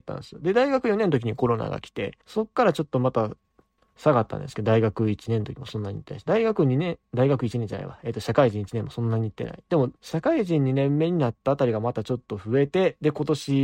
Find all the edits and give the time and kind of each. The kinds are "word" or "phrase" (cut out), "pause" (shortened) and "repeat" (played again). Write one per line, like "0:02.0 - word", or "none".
0:02.2 - pause
0:03.8 - pause
0:10.0 - pause